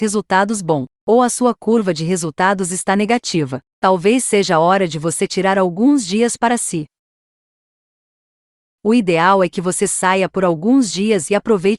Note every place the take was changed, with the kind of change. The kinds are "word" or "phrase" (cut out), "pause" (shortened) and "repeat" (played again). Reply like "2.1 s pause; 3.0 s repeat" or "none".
none